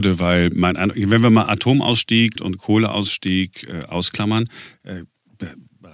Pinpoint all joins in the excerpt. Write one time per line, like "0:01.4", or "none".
0:02.4